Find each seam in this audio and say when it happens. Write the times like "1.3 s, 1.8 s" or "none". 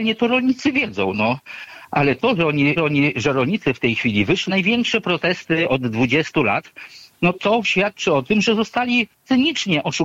2.8 s, 4.5 s, 7.3 s